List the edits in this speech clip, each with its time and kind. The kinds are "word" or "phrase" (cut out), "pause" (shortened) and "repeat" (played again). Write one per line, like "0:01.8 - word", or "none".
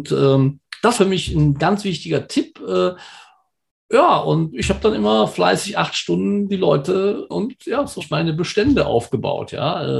0:01.0 - word
0:04.5 - word
0:07.3 - word
0:08.0 - word